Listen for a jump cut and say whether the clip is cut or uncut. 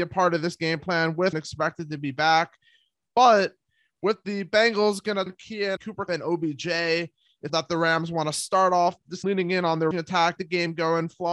cut